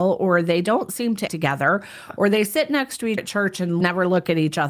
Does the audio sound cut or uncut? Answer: cut